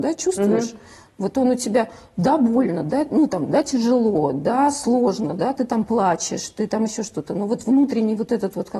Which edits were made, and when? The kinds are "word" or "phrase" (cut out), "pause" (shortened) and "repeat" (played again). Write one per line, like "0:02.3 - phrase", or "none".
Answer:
none